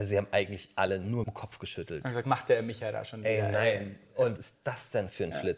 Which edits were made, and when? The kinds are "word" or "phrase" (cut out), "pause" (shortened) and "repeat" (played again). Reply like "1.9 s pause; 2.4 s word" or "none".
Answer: 1.2 s word; 2.2 s word; 4.4 s word